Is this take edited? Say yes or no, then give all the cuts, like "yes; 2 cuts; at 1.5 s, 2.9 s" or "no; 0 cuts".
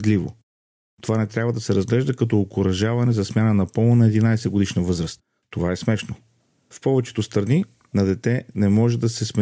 no; 0 cuts